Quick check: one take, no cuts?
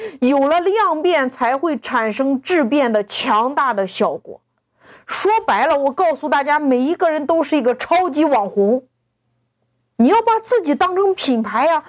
yes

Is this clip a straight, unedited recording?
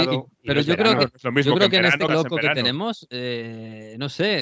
no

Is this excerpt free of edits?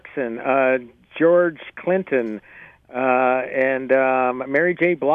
yes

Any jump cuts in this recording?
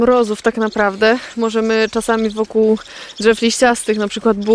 no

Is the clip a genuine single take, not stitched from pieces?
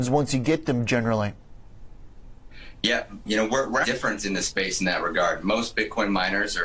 no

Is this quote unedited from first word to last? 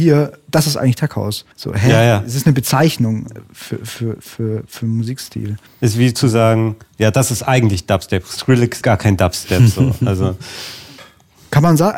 no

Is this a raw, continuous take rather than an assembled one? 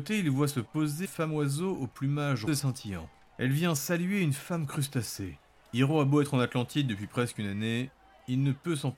no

